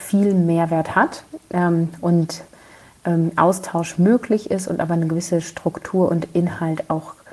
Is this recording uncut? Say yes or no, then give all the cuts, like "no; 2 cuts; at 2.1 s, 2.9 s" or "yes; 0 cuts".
yes; 0 cuts